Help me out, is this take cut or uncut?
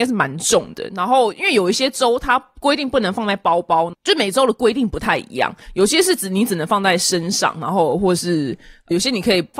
cut